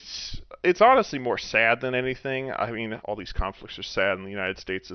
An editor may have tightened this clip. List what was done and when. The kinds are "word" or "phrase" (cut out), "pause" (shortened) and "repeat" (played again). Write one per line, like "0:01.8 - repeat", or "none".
0:03.0 - word